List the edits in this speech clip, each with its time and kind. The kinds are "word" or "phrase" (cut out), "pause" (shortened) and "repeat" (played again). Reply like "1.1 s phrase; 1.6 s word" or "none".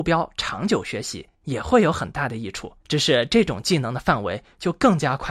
1.3 s pause; 2.8 s pause